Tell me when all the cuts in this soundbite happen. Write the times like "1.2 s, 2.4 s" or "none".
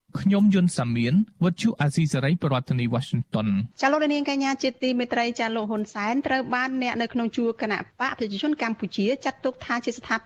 3.7 s